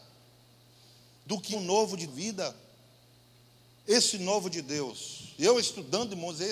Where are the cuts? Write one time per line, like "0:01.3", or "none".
0:01.5
0:02.1
0:03.8